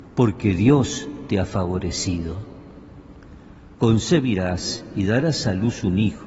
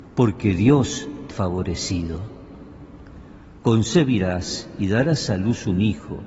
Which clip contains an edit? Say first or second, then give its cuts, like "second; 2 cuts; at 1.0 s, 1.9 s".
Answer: second; 1 cut; at 1.3 s